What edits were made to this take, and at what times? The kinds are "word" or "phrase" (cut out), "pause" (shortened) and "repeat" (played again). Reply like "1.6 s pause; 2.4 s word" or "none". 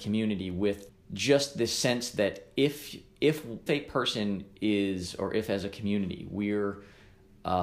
3.7 s word